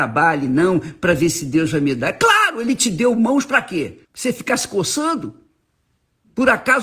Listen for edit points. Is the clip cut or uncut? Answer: cut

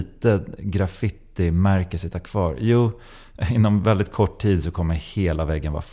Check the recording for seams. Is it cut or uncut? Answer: uncut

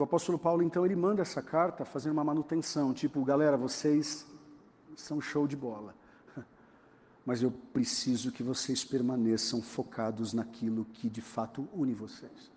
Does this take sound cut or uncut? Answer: uncut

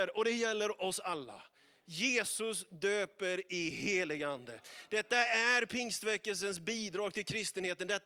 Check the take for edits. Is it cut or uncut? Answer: uncut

